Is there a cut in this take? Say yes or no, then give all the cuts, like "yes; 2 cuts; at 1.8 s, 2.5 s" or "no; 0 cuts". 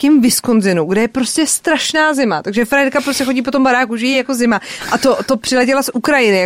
no; 0 cuts